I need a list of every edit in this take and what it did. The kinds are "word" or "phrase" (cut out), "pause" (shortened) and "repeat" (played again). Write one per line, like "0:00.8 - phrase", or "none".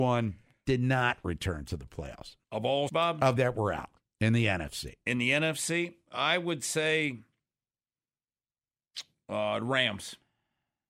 0:02.4 - pause
0:02.9 - word
0:03.4 - phrase
0:04.0 - pause